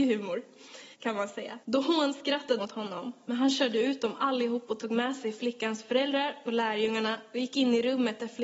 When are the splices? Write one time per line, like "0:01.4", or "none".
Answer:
0:00.9
0:01.6
0:02.6